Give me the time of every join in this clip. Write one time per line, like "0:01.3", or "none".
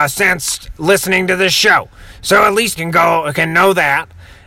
0:02.8